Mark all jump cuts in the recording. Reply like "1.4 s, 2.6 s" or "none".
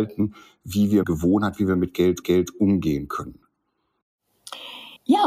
1.0 s, 2.2 s